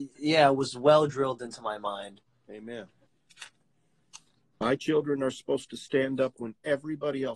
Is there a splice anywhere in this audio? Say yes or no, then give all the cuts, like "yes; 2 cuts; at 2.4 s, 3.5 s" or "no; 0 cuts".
no; 0 cuts